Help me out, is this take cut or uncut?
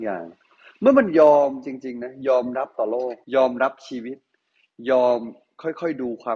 cut